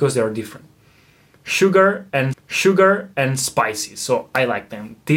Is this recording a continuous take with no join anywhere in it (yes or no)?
no